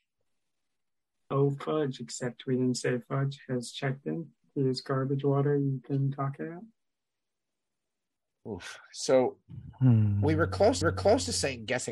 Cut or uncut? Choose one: cut